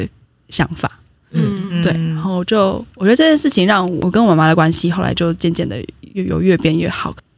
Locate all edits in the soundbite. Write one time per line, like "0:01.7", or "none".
none